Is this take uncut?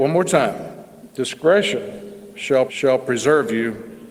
no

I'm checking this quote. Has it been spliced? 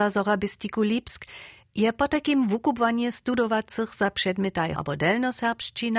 yes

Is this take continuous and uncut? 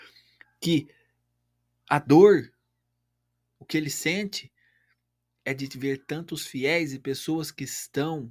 yes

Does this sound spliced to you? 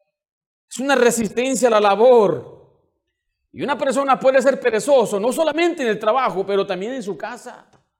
no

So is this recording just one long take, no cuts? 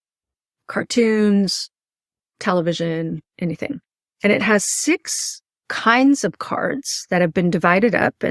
no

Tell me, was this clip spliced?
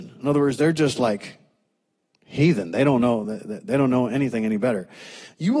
no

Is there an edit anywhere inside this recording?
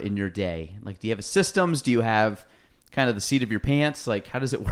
no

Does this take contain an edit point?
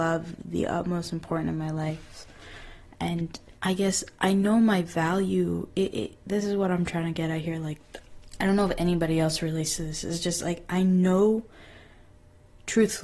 yes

